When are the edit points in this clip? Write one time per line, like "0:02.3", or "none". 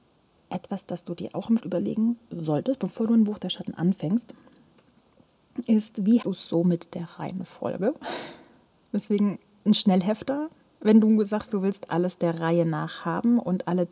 0:01.6
0:06.2